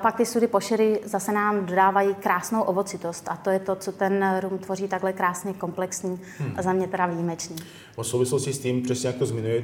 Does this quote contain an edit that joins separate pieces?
yes; 1 cut; at 8.0 s

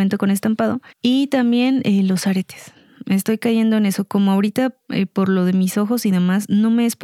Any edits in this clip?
yes; 2 cuts; at 0.9 s, 4.8 s

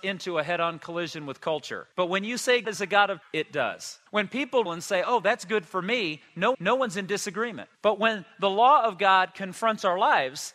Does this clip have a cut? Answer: yes; 7 cuts; at 1.9 s, 2.6 s, 3.2 s, 4.1 s, 4.7 s, 6.5 s, 7.7 s

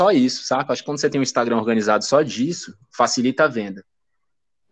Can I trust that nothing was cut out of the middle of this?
yes; 0 cuts

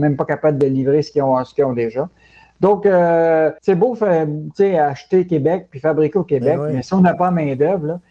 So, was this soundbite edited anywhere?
yes; 1 cut; at 3.6 s

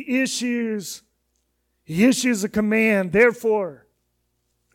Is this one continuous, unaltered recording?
yes; 0 cuts

